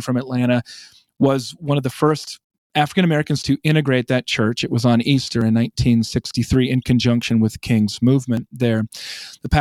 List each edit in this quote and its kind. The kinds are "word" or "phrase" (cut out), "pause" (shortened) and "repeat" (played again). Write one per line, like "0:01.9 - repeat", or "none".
none